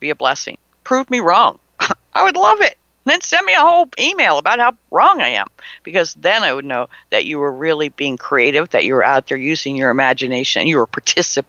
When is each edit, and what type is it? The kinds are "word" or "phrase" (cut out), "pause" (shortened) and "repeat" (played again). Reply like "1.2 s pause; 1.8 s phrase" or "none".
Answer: none